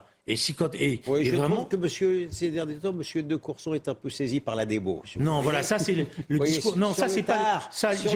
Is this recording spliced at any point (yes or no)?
no